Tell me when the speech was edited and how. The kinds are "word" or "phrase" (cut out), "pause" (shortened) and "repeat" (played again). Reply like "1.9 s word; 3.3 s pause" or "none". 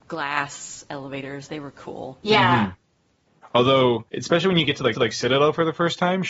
4.1 s pause; 4.9 s repeat